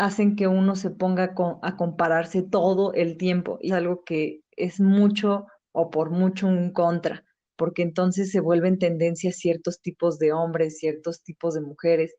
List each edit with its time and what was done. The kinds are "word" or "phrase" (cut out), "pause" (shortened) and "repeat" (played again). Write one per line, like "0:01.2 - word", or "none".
0:03.7 - word
0:07.4 - pause